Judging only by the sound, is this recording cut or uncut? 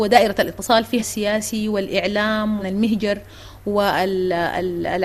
cut